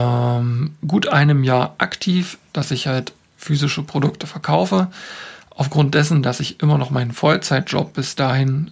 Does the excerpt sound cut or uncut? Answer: uncut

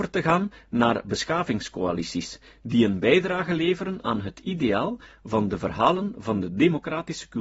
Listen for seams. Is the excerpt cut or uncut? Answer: uncut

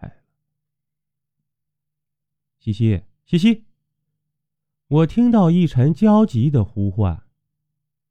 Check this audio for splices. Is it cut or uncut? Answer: uncut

